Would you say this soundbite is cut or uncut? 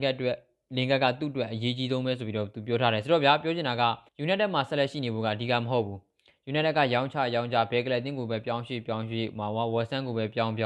cut